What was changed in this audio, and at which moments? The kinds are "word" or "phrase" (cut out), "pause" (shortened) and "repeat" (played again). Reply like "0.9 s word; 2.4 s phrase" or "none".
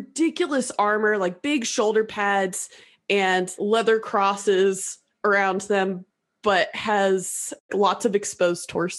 3.6 s word; 7.7 s word